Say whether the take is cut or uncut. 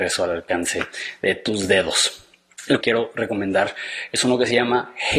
cut